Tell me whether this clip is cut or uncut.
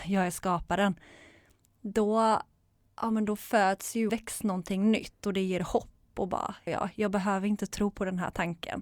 cut